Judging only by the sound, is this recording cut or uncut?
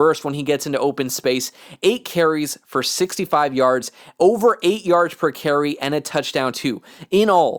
uncut